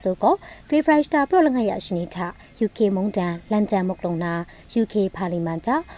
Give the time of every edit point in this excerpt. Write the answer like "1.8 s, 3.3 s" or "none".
none